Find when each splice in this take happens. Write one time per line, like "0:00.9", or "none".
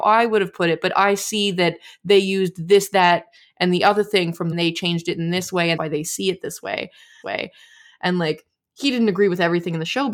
0:04.5
0:05.8
0:07.2